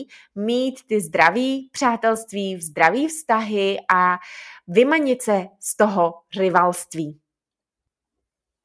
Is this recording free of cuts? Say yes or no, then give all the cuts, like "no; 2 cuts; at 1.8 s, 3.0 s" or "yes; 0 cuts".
yes; 0 cuts